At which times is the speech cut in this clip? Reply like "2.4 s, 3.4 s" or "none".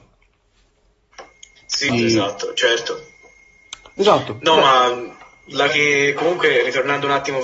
1.9 s, 5.7 s